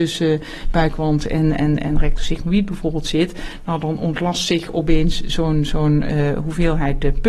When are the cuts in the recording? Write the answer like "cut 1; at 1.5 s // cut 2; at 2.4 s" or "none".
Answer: none